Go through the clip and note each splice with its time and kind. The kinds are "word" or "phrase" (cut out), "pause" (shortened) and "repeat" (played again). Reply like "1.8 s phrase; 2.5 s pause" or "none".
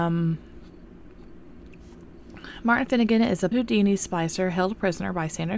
3.5 s word